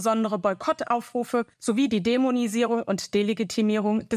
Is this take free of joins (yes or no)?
no